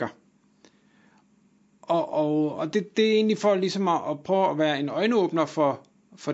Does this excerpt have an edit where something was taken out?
no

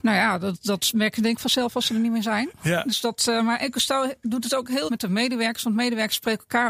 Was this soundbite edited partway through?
yes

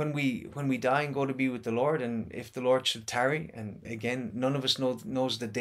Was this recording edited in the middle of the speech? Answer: yes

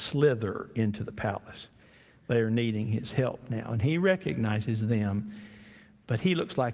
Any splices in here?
no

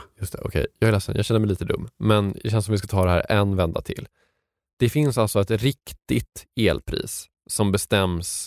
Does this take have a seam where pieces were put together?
no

